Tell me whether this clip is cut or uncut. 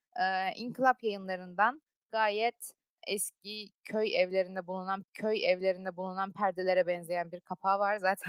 cut